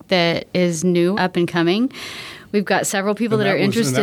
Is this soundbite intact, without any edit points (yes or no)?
no